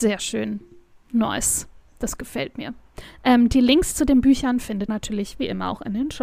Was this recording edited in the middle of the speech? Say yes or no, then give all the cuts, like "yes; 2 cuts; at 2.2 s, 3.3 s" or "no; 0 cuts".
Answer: yes; 1 cut; at 4.9 s